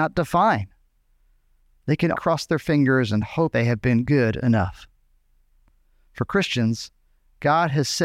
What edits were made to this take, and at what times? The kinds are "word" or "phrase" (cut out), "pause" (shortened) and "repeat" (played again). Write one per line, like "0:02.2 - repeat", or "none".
0:02.1 - word
0:03.5 - word